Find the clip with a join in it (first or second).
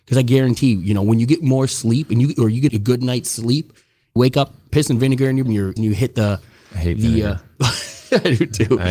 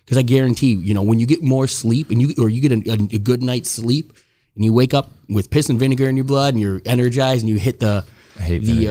first